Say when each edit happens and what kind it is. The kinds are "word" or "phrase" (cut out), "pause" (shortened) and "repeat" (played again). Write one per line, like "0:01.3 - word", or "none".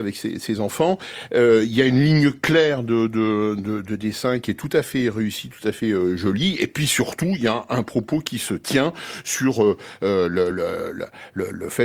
none